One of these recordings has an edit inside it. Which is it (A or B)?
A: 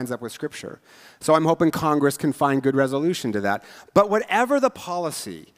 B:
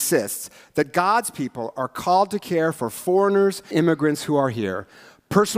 B